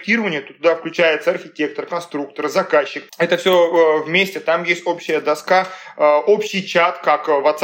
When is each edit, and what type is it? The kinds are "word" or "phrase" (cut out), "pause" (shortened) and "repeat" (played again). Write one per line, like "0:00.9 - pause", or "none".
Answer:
0:03.1 - pause